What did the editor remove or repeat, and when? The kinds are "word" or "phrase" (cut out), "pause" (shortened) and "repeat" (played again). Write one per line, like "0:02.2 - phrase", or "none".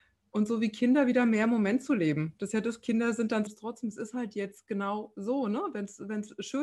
0:03.5 - phrase